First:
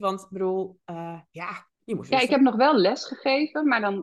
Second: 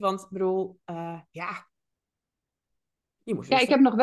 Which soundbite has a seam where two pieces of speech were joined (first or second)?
first